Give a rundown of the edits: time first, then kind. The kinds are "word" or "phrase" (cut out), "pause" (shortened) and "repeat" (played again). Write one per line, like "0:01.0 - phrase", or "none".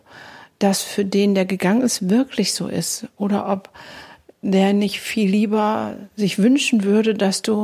none

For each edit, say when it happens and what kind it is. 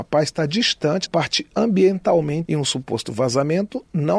0:01.1 - word
0:02.4 - word

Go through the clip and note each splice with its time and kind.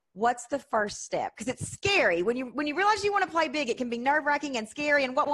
none

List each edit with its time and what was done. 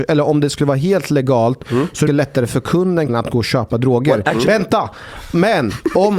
0:02.1 - word
0:03.1 - word

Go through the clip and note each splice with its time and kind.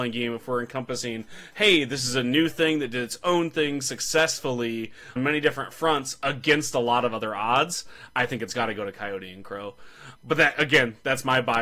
0:05.2 - word
0:10.2 - word

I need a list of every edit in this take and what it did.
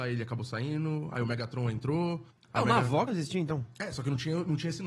0:02.3 - pause
0:03.1 - word

